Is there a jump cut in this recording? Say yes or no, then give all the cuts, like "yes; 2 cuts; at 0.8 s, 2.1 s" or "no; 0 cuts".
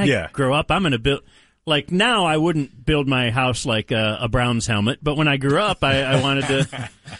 no; 0 cuts